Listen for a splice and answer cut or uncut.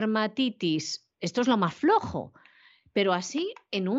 uncut